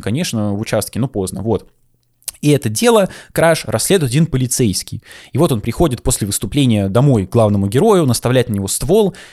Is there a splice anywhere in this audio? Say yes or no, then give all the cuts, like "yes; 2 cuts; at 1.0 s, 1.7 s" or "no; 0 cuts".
no; 0 cuts